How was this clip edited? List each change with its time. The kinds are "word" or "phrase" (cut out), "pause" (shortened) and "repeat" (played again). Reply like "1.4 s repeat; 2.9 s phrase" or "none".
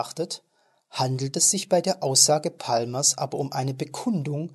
none